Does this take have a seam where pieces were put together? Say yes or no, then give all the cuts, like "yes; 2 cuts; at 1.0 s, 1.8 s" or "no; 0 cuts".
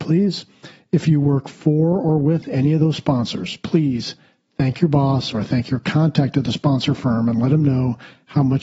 no; 0 cuts